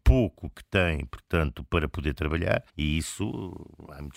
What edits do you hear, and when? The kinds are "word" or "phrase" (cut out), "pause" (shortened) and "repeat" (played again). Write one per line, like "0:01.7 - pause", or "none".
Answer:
0:02.7 - pause